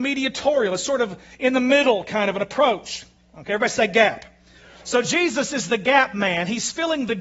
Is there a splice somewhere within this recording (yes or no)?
no